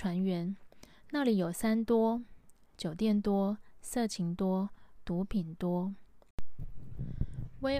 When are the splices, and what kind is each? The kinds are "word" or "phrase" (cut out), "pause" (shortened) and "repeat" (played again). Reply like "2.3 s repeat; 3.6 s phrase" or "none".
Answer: none